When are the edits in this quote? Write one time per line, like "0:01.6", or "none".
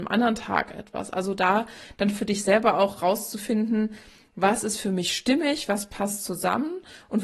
none